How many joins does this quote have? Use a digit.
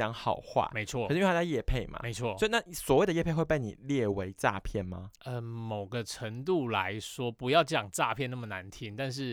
1